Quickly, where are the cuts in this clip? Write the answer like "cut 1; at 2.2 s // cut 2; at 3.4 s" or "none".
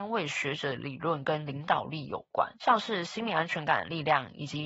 cut 1; at 2.6 s